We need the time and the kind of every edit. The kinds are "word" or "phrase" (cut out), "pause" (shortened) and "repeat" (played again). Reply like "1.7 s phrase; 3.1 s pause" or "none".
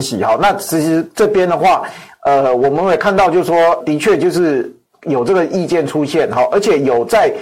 3.8 s word